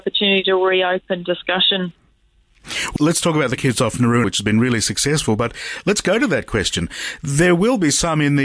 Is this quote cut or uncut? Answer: cut